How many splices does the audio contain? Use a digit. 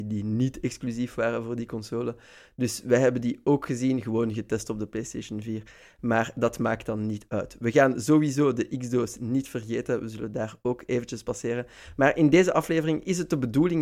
0